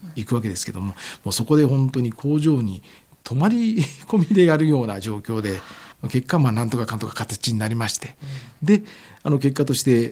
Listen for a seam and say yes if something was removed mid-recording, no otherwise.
no